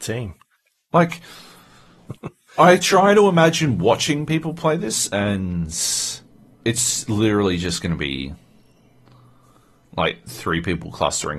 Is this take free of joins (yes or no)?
yes